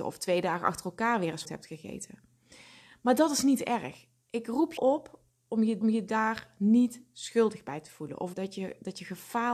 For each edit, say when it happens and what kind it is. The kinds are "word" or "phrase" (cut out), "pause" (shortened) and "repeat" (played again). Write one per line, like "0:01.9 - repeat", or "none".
0:01.4 - phrase
0:04.8 - word
0:05.8 - repeat
0:08.3 - phrase